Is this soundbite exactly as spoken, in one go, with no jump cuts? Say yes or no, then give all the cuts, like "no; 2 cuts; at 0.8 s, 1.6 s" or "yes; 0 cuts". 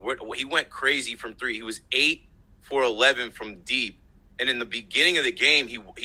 yes; 0 cuts